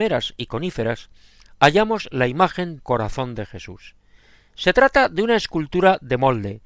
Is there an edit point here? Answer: yes; 1 cut; at 2.8 s

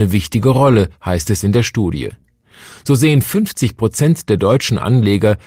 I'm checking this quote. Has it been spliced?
no; 0 cuts

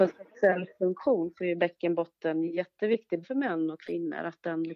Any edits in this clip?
yes; 1 cut; at 3.2 s

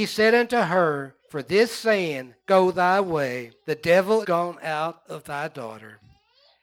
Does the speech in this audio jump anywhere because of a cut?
yes; 4 cuts; at 1.2 s, 2.4 s, 3.6 s, 4.2 s

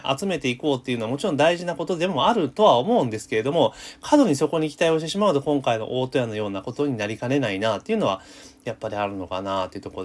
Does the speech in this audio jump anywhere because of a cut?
no; 0 cuts

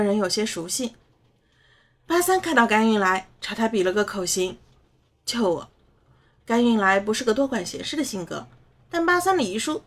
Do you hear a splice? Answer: no; 0 cuts

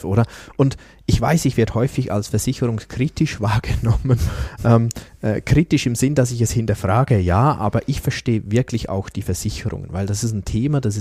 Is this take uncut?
yes; 0 cuts

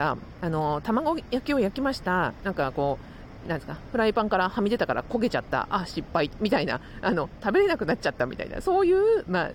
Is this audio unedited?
no; 1 cut; at 3.5 s

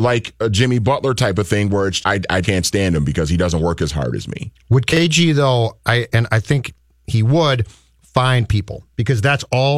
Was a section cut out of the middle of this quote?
yes; 2 cuts; at 2.0 s, 2.4 s

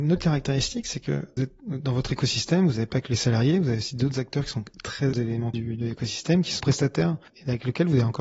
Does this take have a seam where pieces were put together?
yes; 4 cuts; at 1.4 s, 5.1 s, 5.5 s, 6.6 s

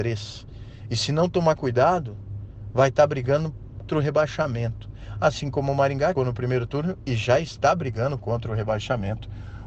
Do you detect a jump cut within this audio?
yes; 2 cuts; at 3.9 s, 6.2 s

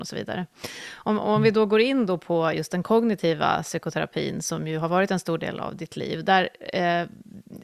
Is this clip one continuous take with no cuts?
yes; 0 cuts

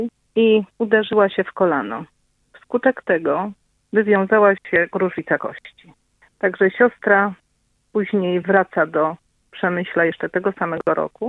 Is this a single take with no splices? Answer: yes; 0 cuts

